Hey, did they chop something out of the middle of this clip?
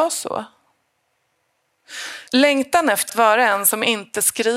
yes; 2 cuts; at 2.3 s, 3.1 s

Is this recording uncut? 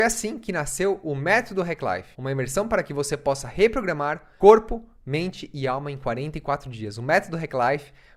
no; 1 cut; at 2.1 s

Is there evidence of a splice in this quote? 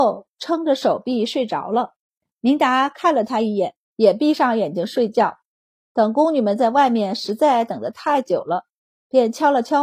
yes; 1 cut; at 3.8 s

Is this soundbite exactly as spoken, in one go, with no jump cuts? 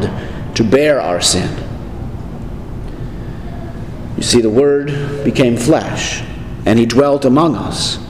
yes; 0 cuts

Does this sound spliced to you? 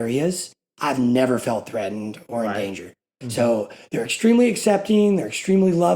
no; 0 cuts

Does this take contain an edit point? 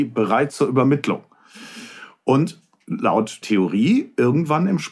yes; 1 cut; at 3.4 s

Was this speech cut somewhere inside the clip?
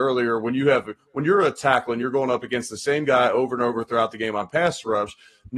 no; 0 cuts

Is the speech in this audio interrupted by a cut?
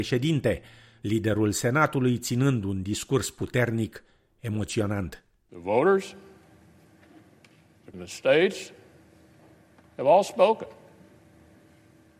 yes; 1 cut; at 7.9 s

